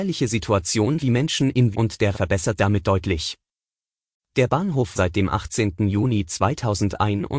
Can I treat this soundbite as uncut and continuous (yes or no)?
no